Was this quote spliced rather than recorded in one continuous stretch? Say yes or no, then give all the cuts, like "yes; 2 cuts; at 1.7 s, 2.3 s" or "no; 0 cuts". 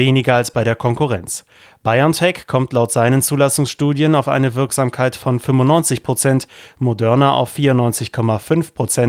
no; 0 cuts